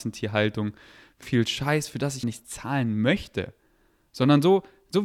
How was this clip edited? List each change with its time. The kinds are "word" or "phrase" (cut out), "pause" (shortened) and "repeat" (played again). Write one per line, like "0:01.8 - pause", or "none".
0:01.2 - word
0:02.2 - word